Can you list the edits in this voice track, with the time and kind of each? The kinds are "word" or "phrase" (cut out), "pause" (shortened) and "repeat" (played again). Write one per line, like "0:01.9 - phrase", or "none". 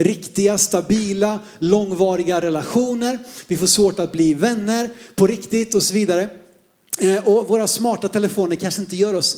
none